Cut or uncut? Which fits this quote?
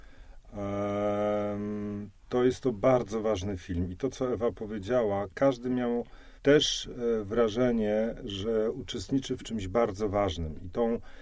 cut